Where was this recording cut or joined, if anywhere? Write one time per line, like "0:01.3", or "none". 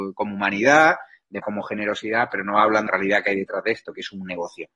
0:01.4
0:02.9